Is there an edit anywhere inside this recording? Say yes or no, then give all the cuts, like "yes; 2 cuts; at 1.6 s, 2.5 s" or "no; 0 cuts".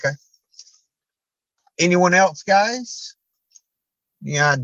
no; 0 cuts